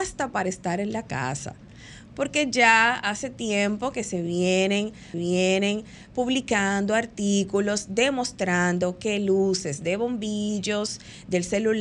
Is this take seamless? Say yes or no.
no